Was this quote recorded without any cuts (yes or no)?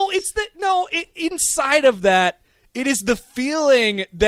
yes